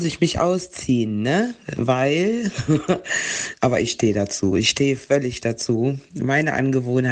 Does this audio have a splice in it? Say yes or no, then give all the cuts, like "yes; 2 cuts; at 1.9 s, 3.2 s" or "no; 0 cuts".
no; 0 cuts